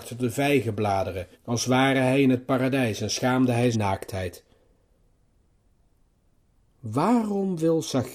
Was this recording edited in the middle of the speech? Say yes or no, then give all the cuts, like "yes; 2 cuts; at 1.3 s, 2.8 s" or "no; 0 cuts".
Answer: yes; 2 cuts; at 1.3 s, 3.7 s